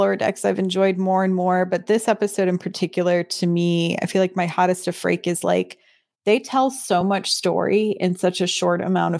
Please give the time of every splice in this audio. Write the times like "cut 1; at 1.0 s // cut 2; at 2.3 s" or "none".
none

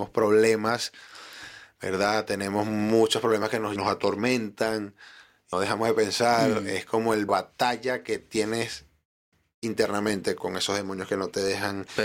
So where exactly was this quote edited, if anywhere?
cut 1; at 3.8 s // cut 2; at 5.5 s // cut 3; at 7.3 s // cut 4; at 10.4 s

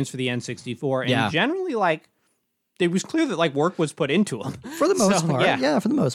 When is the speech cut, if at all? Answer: none

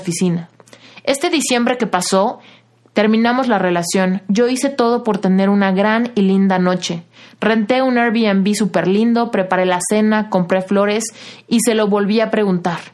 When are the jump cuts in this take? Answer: none

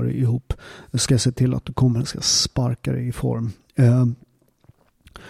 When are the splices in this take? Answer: none

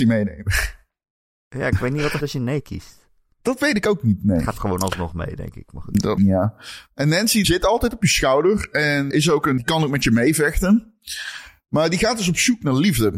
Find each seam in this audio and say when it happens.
cut 1; at 2.2 s // cut 2; at 4.6 s // cut 3; at 6.2 s // cut 4; at 7.4 s // cut 5; at 9.1 s // cut 6; at 9.6 s

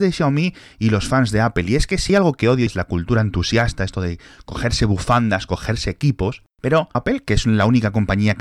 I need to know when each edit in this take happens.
cut 1; at 2.1 s // cut 2; at 2.7 s // cut 3; at 6.9 s

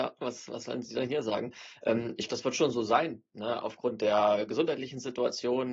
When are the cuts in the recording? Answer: cut 1; at 2.3 s

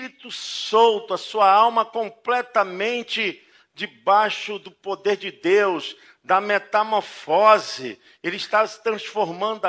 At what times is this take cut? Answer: none

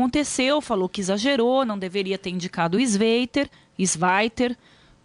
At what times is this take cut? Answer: none

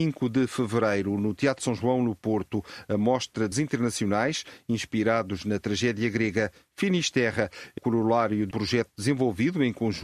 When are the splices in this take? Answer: cut 1; at 1.6 s // cut 2; at 3.5 s // cut 3; at 7.8 s // cut 4; at 8.5 s

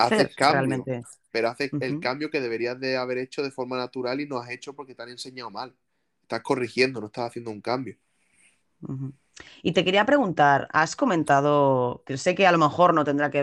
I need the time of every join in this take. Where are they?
none

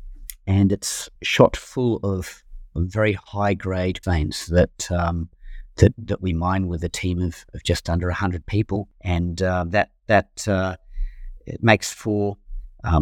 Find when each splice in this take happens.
cut 1; at 1.2 s // cut 2; at 4.0 s

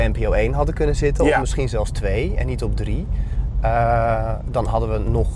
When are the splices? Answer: none

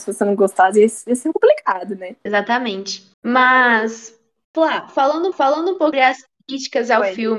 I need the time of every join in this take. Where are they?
cut 1; at 1.3 s // cut 2; at 3.1 s // cut 3; at 5.3 s // cut 4; at 5.9 s

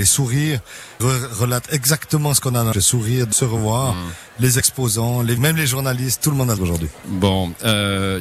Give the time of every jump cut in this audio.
cut 1; at 1.0 s // cut 2; at 2.7 s // cut 3; at 3.3 s // cut 4; at 5.4 s // cut 5; at 6.6 s

